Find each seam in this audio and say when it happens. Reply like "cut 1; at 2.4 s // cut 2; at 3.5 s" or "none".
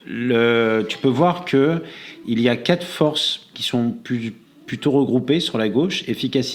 none